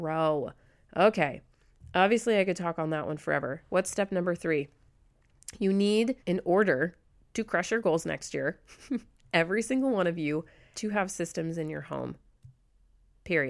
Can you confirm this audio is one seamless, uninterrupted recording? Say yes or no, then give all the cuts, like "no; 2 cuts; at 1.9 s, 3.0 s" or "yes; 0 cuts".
no; 2 cuts; at 6.2 s, 10.7 s